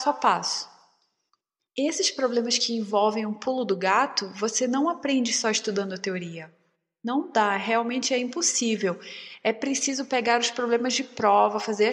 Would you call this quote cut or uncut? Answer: uncut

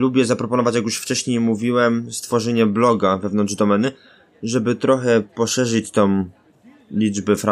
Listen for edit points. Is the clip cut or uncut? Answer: uncut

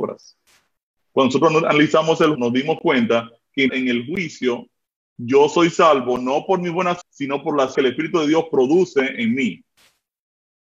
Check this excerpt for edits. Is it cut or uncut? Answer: cut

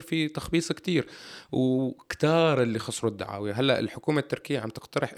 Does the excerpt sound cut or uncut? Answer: uncut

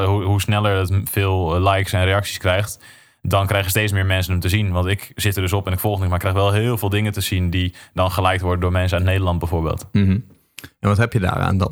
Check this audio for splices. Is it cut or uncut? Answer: uncut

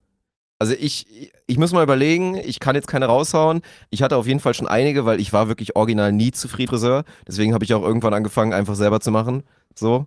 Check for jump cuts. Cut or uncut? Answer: cut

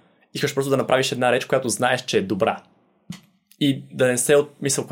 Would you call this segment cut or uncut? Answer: uncut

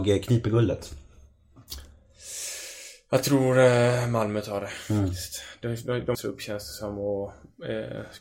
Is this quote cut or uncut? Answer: cut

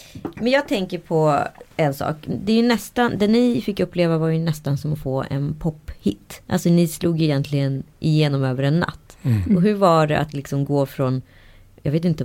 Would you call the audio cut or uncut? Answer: cut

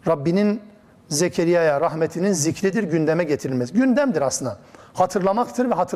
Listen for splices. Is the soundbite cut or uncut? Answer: uncut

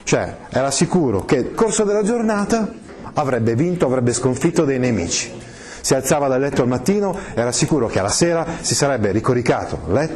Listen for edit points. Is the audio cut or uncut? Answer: cut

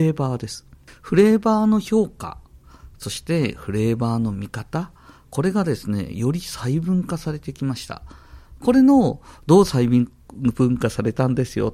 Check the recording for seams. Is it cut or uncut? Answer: uncut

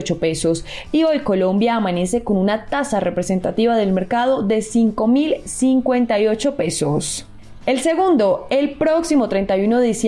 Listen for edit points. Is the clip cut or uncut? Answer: uncut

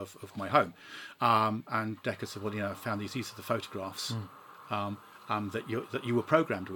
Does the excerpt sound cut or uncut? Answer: uncut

